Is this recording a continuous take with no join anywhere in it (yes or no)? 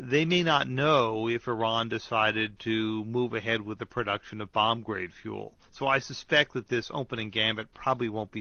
no